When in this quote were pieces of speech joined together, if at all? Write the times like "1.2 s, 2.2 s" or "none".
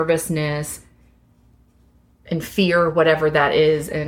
none